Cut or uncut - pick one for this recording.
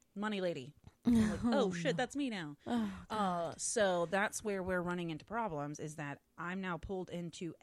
uncut